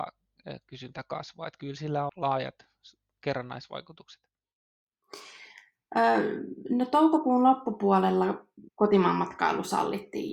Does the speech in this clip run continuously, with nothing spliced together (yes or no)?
no